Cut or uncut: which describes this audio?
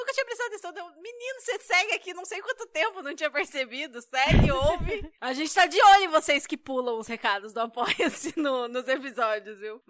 uncut